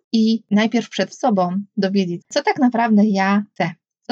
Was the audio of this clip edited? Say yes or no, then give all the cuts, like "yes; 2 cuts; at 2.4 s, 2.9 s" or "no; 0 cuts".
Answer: yes; 2 cuts; at 1.1 s, 2.2 s